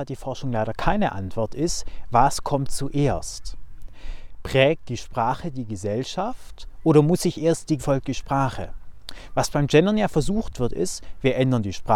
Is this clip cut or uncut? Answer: cut